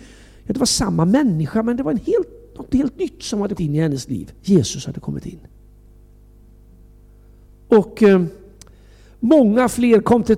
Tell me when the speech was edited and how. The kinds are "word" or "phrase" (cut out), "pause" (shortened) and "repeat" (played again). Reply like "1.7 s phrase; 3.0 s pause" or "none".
3.6 s word; 4.4 s pause

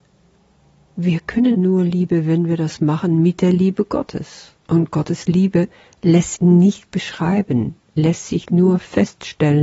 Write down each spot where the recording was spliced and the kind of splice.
1.5 s word; 4.6 s pause; 6.4 s word; 8.0 s word

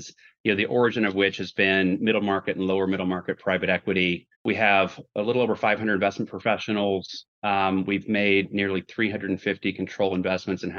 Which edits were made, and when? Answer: 4.3 s pause

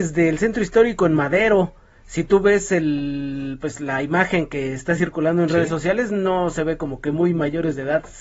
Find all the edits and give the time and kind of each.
none

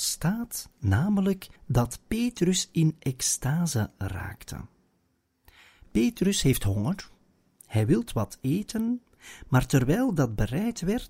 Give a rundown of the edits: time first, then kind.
1.6 s pause

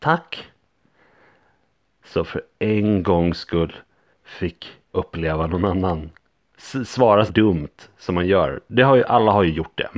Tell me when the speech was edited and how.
4.9 s word; 7.3 s word

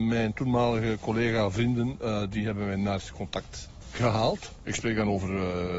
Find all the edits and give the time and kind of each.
none

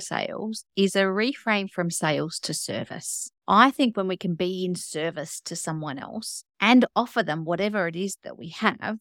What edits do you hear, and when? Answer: 3.4 s pause; 6.5 s pause

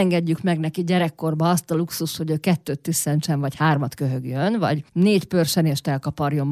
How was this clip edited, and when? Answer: 4.9 s pause

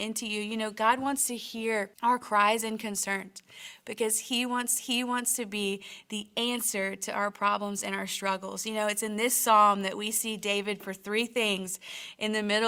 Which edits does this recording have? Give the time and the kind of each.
1.9 s pause; 4.8 s repeat; 10.8 s word

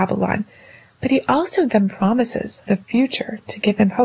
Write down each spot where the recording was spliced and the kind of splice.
1.7 s word; 2.7 s word

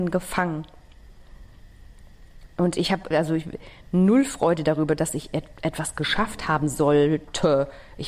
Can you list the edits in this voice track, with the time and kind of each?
3.1 s word

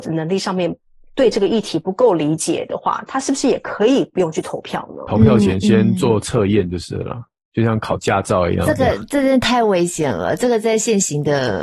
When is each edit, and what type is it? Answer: none

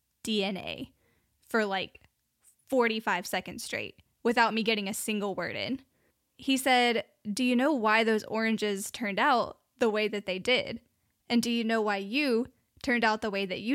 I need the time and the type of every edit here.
none

